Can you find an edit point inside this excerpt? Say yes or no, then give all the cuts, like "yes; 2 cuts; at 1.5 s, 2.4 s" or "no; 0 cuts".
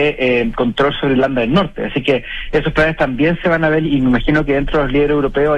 yes; 1 cut; at 3.8 s